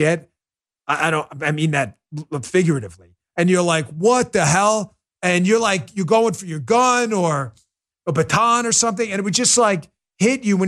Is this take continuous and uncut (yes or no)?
yes